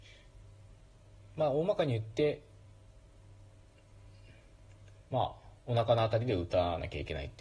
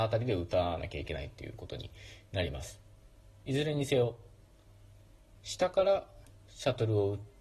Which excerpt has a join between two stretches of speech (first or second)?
first